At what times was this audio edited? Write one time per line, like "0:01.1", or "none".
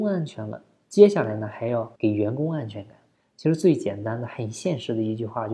0:02.0
0:03.1